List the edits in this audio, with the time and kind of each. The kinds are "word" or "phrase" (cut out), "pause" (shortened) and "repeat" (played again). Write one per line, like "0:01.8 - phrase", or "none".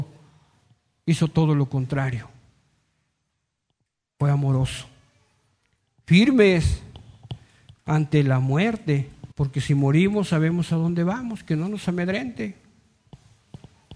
0:09.3 - pause